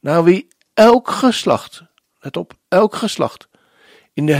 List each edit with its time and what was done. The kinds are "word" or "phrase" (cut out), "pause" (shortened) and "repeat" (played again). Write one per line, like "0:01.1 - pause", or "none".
0:02.0 - pause